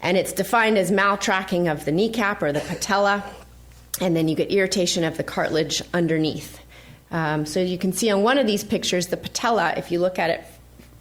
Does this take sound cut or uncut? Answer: uncut